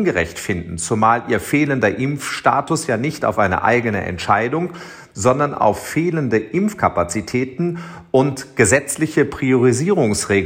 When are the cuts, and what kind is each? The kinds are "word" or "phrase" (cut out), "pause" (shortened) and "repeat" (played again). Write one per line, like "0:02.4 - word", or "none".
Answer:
none